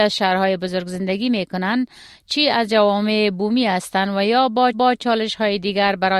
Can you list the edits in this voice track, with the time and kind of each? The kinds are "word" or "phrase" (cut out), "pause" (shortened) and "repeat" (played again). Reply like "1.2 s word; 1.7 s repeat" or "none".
4.7 s repeat